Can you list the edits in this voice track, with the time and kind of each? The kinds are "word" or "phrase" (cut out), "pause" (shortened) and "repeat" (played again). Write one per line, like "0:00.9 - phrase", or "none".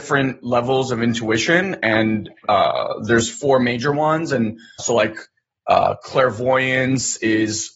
0:04.8 - word